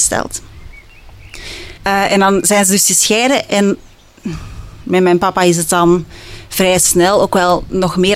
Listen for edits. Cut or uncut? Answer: cut